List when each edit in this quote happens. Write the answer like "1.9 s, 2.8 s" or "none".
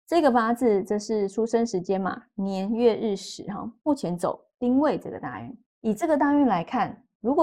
5.7 s